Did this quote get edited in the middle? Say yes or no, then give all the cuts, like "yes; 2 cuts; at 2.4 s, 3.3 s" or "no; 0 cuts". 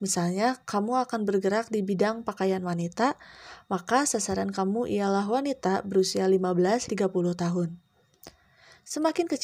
yes; 1 cut; at 6.9 s